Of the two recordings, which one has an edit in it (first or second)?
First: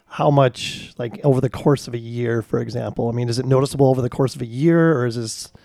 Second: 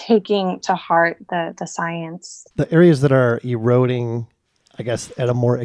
second